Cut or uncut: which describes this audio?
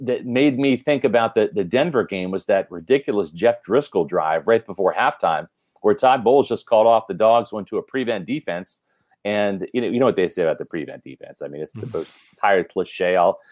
uncut